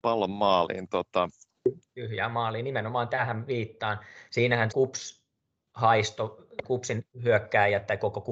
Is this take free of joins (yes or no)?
no